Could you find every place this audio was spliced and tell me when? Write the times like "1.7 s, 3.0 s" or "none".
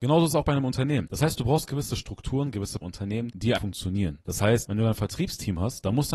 2.8 s, 3.6 s